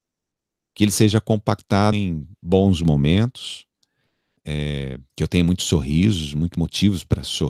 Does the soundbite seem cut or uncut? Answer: cut